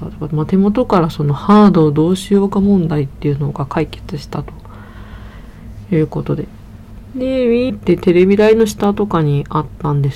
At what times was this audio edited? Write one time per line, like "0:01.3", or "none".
0:07.7